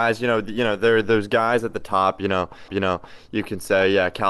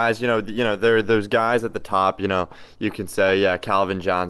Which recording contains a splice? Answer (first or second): first